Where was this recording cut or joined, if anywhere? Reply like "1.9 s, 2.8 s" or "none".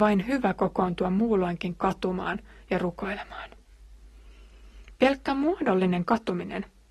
none